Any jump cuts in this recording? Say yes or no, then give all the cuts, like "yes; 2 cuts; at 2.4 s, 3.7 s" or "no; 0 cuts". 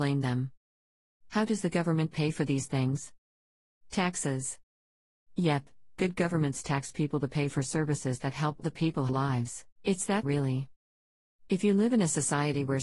yes; 4 cuts; at 8.6 s, 9.1 s, 9.7 s, 10.2 s